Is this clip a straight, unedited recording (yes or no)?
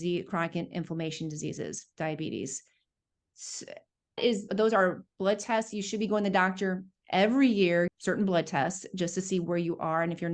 no